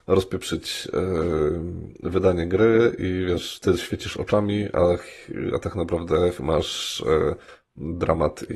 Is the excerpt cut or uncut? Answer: cut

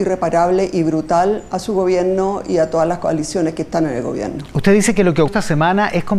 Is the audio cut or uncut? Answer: cut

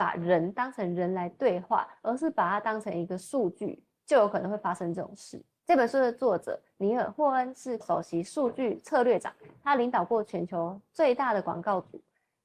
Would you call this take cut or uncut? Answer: cut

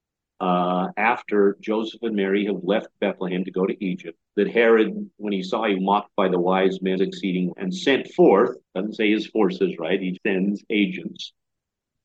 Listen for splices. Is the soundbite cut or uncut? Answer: cut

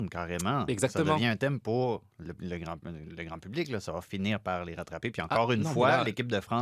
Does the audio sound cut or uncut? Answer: uncut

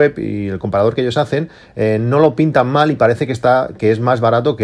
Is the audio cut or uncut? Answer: uncut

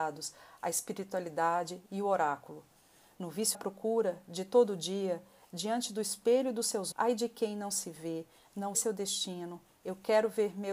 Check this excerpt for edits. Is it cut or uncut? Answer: cut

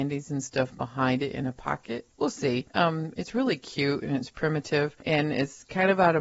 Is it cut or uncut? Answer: cut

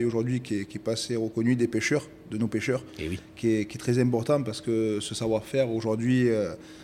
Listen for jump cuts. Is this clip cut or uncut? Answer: uncut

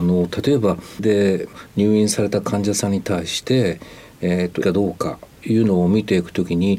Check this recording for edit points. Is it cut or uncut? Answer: cut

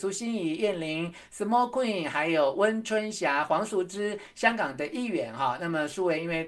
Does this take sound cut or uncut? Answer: uncut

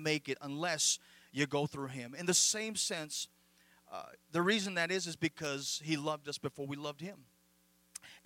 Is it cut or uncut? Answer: uncut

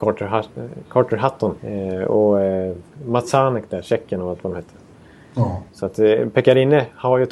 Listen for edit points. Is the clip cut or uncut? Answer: cut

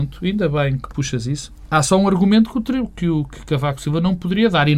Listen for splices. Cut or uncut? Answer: uncut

